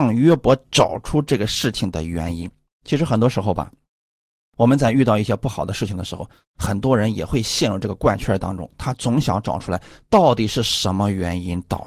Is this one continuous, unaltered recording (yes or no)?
yes